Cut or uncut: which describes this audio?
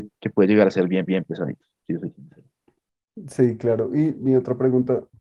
cut